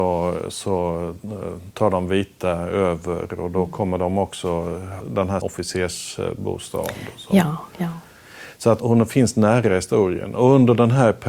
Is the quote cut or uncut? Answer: cut